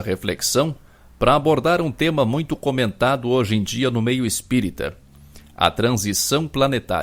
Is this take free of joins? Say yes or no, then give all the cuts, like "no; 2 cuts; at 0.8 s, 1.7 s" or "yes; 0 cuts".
yes; 0 cuts